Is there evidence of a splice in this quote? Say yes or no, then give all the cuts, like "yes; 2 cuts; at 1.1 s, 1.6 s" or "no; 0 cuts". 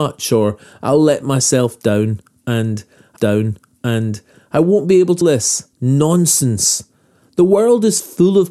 yes; 3 cuts; at 3.2 s, 5.2 s, 5.7 s